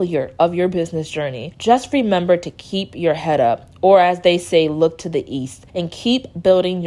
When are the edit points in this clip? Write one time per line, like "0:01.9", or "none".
0:01.5
0:05.7